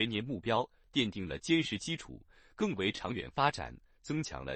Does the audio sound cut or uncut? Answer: uncut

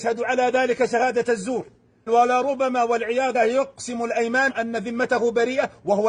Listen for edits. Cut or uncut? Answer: cut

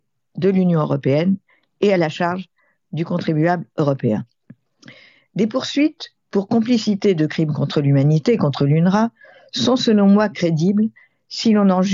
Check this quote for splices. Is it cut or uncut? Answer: uncut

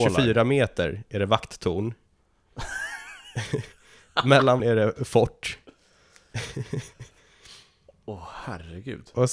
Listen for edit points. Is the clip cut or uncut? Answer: cut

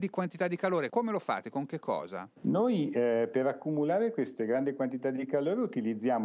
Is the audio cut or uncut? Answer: cut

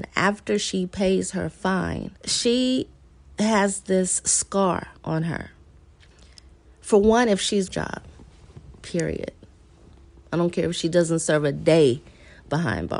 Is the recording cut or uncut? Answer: cut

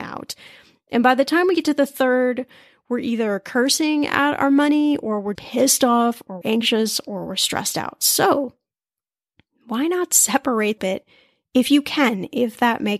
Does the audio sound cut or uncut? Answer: cut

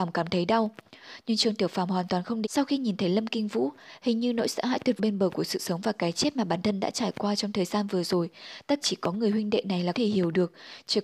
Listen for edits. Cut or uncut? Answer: cut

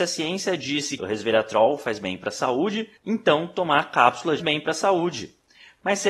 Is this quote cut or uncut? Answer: cut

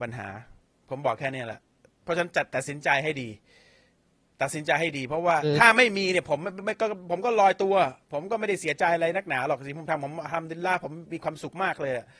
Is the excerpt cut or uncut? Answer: uncut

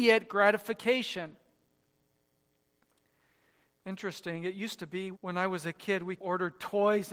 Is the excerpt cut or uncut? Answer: cut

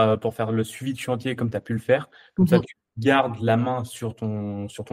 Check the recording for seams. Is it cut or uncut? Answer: uncut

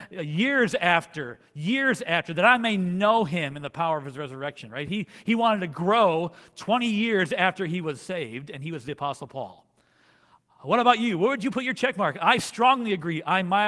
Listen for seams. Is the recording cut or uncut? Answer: uncut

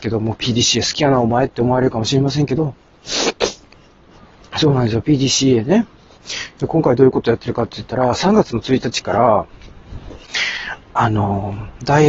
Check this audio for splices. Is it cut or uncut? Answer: uncut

